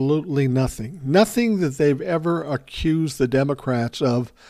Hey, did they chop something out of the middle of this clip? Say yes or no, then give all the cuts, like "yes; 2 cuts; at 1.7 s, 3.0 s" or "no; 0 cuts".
no; 0 cuts